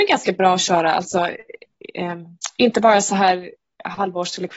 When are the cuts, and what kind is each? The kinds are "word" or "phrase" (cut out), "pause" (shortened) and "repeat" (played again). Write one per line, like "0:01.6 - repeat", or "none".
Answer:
none